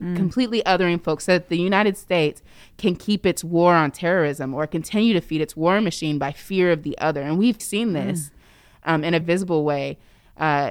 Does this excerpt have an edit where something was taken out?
yes; 2 cuts; at 7.6 s, 9.2 s

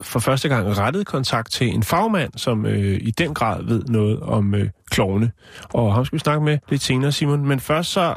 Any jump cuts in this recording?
yes; 1 cut; at 6.6 s

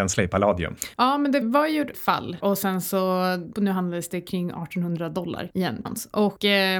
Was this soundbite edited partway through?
yes; 5 cuts; at 1.4 s, 1.9 s, 2.4 s, 3.5 s, 5.8 s

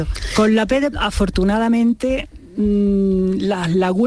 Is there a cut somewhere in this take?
yes; 1 cut; at 0.9 s

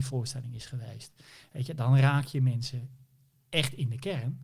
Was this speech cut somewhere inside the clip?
no; 0 cuts

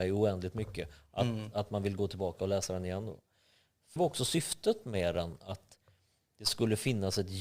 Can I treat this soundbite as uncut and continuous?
no; 1 cut; at 4.0 s

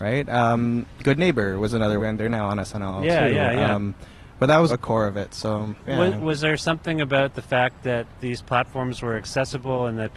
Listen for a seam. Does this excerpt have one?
yes; 3 cuts; at 2.0 s, 4.7 s, 5.8 s

